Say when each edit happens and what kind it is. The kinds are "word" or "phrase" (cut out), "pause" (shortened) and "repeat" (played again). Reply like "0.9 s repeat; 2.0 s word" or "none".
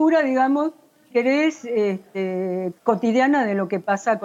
1.1 s word; 2.8 s pause